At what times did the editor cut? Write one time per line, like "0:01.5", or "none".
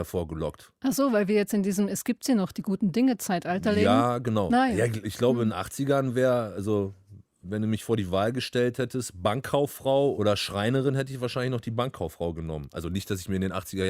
none